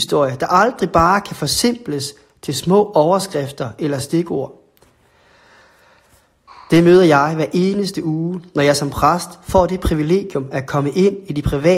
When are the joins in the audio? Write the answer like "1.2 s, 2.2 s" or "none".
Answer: none